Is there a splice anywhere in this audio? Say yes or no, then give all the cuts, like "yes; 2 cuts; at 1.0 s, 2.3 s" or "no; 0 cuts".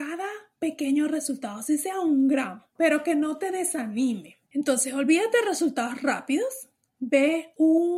yes; 2 cuts; at 2.7 s, 4.5 s